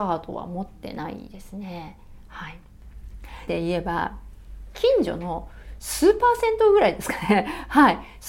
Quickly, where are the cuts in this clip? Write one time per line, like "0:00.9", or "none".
0:03.5